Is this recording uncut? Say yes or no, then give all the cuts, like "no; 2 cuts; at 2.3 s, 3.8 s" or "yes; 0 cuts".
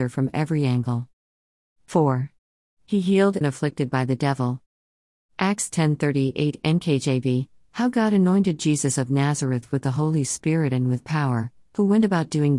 no; 1 cut; at 3.4 s